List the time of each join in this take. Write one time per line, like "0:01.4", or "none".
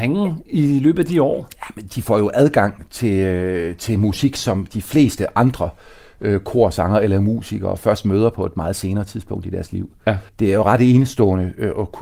0:10.3